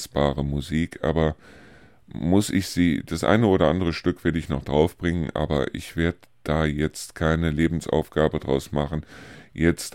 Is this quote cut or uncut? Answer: uncut